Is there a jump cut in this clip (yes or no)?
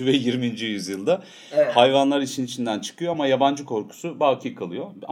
no